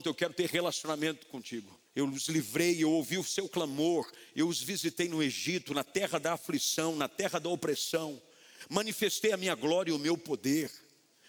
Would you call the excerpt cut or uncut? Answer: cut